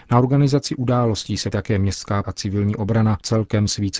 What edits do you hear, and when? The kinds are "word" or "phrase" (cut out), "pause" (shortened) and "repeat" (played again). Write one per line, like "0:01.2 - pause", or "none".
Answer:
0:01.5 - word
0:02.2 - word

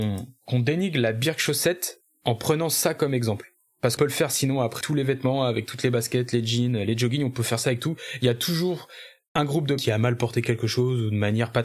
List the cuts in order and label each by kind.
0:04.0 - word
0:04.8 - word
0:09.8 - word

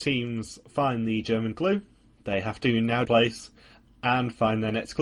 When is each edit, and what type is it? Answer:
0:03.0 - phrase

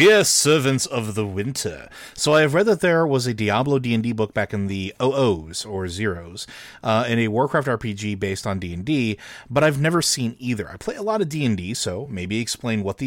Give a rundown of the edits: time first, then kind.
none

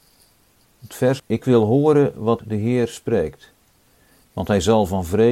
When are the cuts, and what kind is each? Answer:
0:01.2 - word
0:02.4 - word

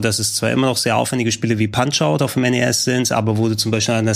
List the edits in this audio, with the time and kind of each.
none

